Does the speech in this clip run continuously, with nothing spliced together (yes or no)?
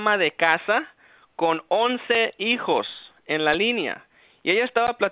yes